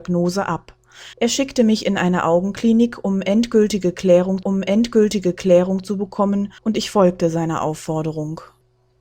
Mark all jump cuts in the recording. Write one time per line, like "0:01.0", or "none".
0:01.1
0:04.4
0:06.6